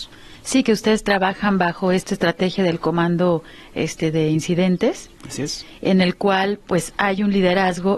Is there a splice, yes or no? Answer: no